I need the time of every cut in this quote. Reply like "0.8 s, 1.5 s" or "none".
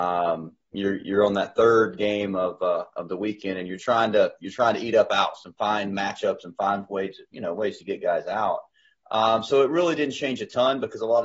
3.8 s